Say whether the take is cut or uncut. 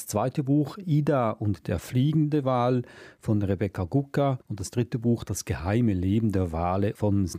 cut